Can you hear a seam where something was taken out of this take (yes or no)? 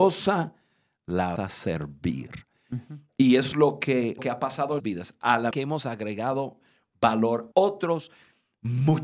yes